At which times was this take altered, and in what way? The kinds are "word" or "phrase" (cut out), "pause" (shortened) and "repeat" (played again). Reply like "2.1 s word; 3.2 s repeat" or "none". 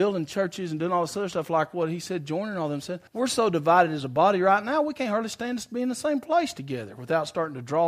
3.1 s pause